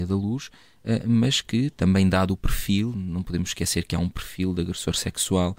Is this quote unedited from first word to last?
yes; 0 cuts

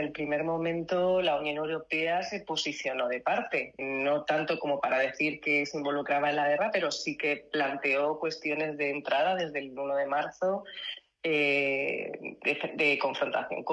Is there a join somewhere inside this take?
yes; 1 cut; at 3.8 s

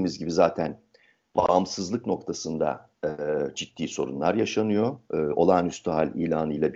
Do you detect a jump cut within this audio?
yes; 1 cut; at 3.5 s

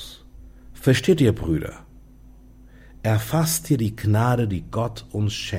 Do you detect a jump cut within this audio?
no; 0 cuts

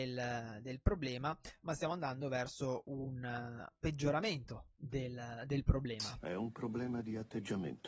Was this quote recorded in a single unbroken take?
yes; 0 cuts

